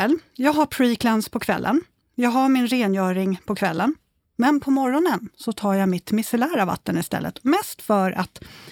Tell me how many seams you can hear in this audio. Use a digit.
0